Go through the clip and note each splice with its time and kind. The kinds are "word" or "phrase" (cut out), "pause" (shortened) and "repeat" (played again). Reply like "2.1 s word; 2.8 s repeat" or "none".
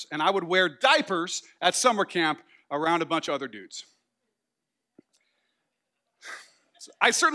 none